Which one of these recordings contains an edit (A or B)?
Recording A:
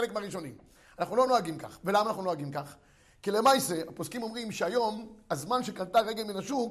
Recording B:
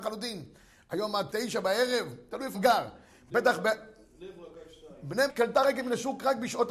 B